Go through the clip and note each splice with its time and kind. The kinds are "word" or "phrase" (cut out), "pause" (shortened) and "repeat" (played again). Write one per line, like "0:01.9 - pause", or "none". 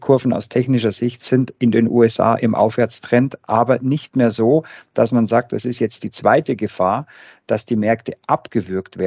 none